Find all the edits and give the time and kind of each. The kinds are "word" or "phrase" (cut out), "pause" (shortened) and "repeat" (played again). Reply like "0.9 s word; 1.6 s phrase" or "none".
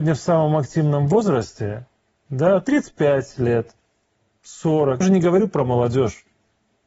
5.0 s word